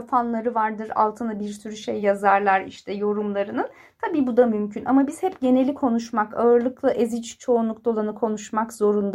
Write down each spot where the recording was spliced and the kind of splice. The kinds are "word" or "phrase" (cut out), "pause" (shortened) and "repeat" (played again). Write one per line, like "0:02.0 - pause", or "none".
none